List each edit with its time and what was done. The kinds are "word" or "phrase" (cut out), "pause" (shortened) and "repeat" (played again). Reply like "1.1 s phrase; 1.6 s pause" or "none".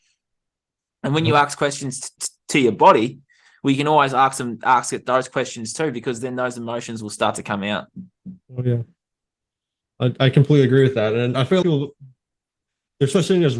2.2 s word; 11.6 s word